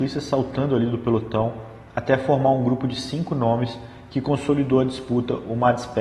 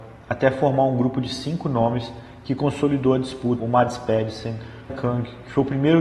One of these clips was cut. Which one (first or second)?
second